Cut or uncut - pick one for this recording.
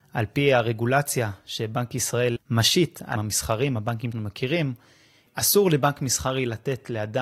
cut